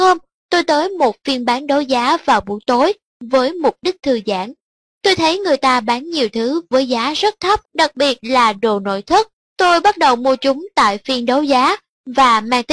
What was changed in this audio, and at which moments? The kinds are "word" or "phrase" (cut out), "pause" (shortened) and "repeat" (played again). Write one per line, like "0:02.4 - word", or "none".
0:07.6 - pause
0:09.4 - pause